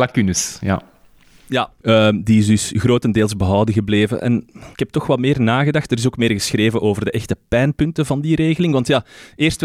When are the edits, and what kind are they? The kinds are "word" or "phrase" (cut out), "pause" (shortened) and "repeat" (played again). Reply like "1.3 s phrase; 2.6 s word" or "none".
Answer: 1.8 s pause; 4.7 s pause